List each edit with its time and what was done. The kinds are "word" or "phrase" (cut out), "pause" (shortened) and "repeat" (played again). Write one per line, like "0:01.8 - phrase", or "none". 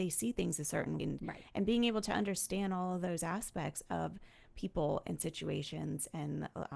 0:01.0 - word